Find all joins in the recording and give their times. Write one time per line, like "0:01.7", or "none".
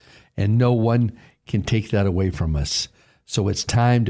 none